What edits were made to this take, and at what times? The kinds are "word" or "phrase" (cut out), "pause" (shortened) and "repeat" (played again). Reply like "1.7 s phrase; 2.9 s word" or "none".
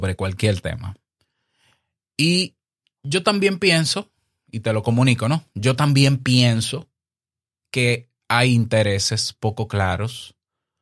none